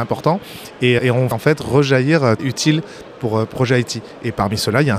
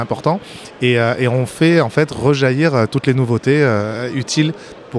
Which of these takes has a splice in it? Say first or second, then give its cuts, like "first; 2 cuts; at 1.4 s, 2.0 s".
first; 4 cuts; at 1.0 s, 1.3 s, 2.4 s, 3.5 s